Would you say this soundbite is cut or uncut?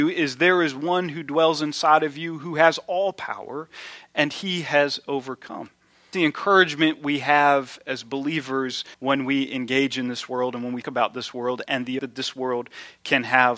cut